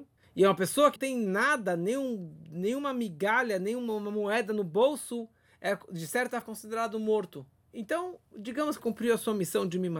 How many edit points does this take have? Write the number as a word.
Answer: three